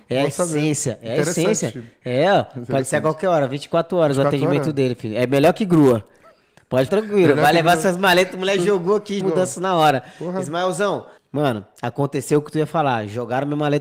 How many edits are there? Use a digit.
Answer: 3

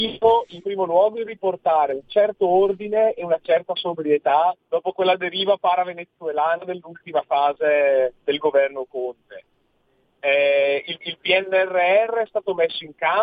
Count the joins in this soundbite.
3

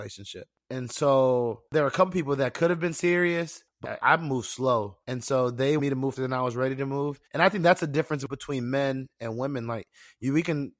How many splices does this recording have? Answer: 6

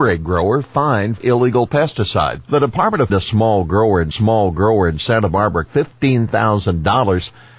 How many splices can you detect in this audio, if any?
5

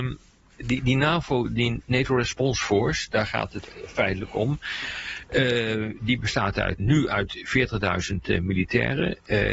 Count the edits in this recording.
1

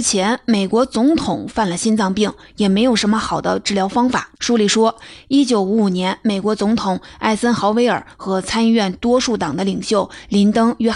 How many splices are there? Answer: 1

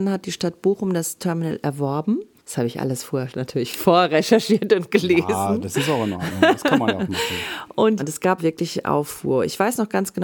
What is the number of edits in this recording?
2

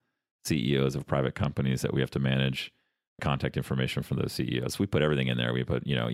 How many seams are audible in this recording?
1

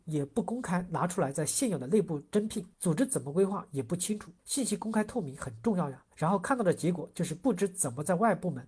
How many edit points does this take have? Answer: 3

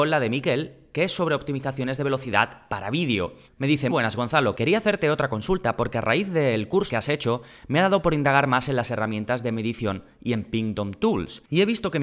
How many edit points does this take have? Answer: 3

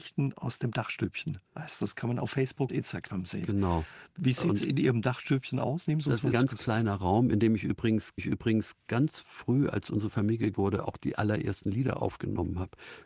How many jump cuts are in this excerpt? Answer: 4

